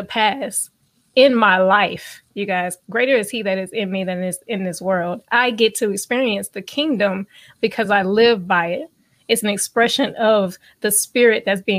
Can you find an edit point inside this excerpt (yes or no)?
no